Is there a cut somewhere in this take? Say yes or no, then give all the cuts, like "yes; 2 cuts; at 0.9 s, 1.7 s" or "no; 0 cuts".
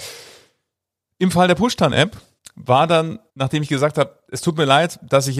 yes; 2 cuts; at 2.4 s, 3.3 s